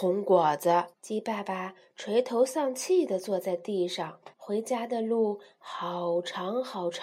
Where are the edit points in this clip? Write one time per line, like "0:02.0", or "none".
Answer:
0:00.9
0:04.3

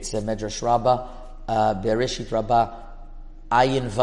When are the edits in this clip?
none

